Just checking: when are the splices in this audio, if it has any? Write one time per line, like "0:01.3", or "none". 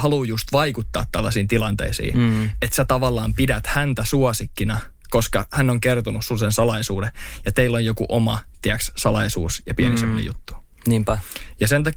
none